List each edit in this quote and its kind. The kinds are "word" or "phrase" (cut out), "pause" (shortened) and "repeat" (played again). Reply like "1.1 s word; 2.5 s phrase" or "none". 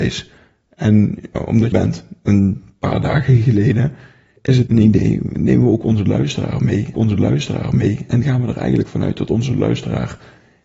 1.3 s word; 1.7 s phrase; 4.7 s word; 6.9 s repeat